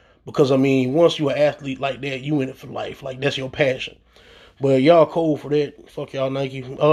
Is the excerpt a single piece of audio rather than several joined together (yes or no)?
yes